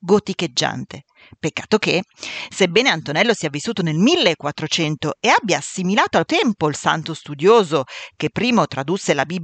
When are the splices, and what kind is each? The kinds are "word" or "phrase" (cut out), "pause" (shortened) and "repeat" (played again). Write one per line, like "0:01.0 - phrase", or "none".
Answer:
0:06.3 - word
0:08.3 - word